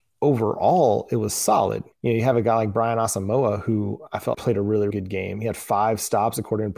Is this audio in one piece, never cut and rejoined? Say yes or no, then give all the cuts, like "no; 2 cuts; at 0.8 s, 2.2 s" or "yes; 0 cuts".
no; 3 cuts; at 1.9 s, 4.3 s, 4.9 s